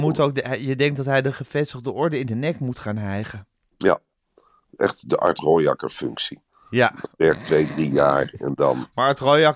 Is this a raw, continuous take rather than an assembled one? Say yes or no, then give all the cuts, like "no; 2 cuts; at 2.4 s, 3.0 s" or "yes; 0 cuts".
yes; 0 cuts